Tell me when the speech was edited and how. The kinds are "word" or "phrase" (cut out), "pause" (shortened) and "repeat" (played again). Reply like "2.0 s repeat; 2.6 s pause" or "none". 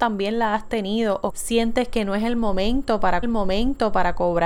1.3 s word; 3.2 s repeat